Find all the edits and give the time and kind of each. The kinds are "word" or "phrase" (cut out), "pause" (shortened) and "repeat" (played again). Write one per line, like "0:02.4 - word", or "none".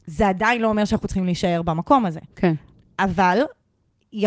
0:02.3 - pause